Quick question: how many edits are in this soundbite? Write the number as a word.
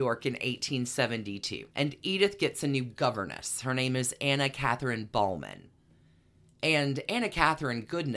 one